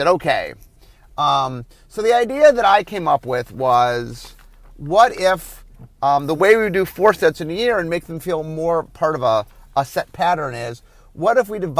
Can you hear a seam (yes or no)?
no